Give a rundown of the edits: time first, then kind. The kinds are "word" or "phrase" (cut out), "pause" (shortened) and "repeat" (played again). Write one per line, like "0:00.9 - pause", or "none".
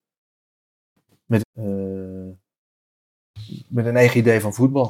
0:01.4 - phrase